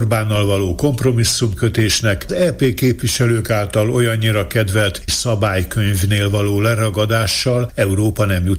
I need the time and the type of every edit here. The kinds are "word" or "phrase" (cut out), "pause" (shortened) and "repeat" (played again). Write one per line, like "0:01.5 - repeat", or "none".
0:02.3 - word
0:05.1 - word